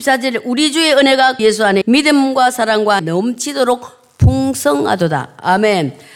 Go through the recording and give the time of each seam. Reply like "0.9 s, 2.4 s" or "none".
1.4 s, 1.8 s, 3.0 s